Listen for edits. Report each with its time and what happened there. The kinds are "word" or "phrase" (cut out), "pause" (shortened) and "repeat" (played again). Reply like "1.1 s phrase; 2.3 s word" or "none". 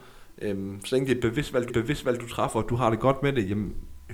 1.7 s repeat